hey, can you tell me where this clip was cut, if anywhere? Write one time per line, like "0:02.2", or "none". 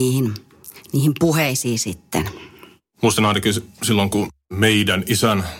none